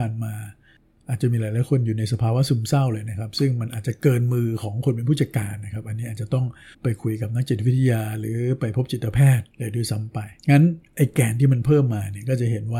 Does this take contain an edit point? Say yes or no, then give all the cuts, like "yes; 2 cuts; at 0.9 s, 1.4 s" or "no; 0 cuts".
yes; 3 cuts; at 6.7 s, 9.5 s, 10.4 s